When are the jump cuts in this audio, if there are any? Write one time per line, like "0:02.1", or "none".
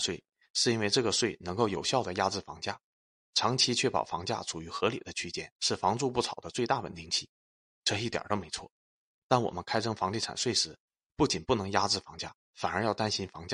0:05.5
0:12.4